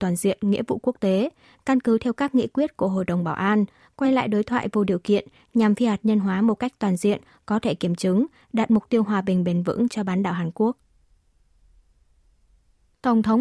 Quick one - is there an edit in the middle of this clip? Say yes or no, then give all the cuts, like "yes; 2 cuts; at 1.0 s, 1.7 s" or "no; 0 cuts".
no; 0 cuts